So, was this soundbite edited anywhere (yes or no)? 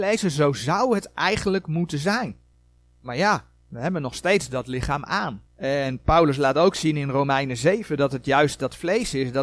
yes